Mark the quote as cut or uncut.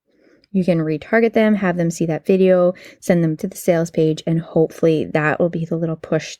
cut